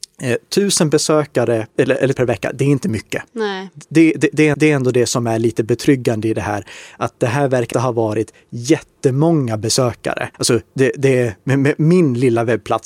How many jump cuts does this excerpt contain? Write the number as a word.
six